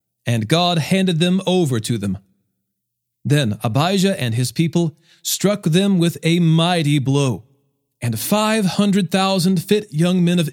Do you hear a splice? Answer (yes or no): no